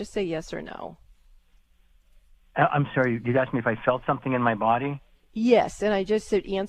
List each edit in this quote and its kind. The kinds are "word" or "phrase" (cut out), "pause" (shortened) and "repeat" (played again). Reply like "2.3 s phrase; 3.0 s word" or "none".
none